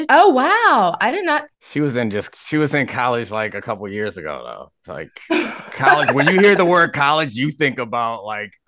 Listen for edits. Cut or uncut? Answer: cut